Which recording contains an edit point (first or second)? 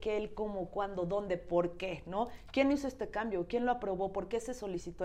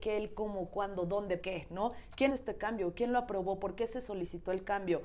second